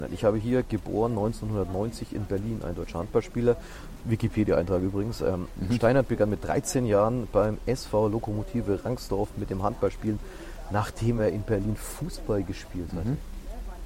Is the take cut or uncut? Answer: uncut